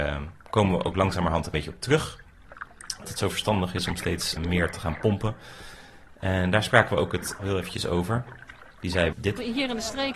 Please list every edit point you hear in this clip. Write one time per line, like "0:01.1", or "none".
0:01.5
0:03.0
0:04.4
0:07.4
0:09.1